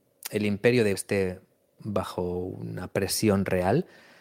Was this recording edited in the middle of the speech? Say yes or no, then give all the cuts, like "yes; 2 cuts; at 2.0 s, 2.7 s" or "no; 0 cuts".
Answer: yes; 2 cuts; at 0.9 s, 1.8 s